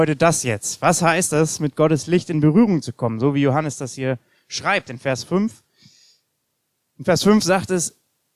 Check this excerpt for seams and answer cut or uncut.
uncut